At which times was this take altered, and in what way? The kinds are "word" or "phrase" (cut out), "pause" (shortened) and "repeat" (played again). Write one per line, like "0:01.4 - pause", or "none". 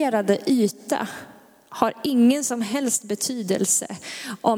none